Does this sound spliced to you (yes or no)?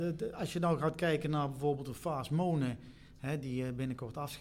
no